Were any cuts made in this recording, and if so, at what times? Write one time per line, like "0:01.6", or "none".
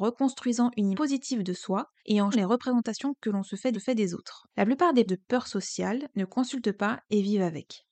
0:00.9
0:02.0
0:02.3
0:03.7
0:04.5
0:05.1